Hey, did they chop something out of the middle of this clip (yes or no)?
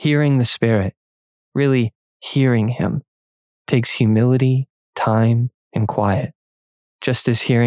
no